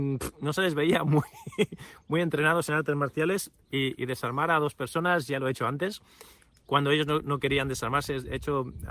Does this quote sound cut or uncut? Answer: uncut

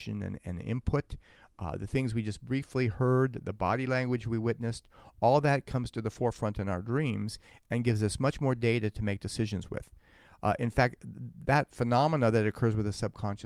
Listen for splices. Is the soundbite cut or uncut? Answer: uncut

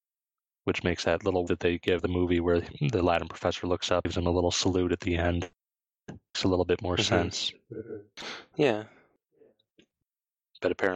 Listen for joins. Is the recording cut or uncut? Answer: cut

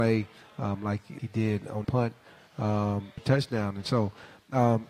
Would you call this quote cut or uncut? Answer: cut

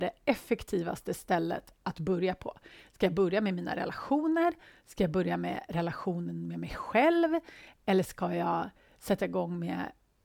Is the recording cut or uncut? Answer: uncut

